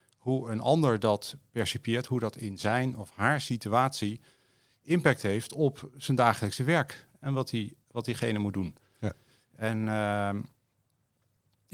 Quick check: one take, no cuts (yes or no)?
yes